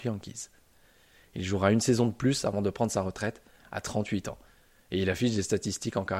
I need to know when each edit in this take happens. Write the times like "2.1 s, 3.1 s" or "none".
none